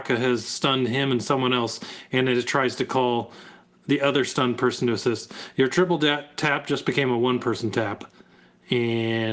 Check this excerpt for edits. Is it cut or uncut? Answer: uncut